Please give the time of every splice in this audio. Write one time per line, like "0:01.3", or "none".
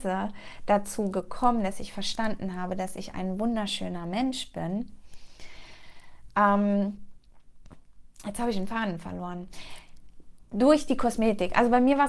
none